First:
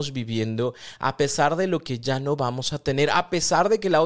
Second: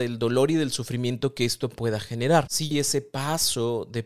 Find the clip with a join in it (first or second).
second